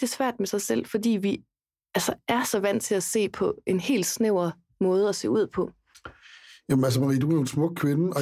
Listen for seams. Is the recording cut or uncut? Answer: uncut